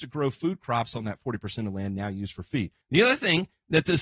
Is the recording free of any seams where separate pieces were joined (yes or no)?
no